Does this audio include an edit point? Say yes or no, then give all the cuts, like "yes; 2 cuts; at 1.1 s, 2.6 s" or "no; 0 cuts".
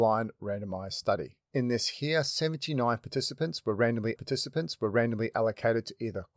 yes; 2 cuts; at 1.4 s, 4.2 s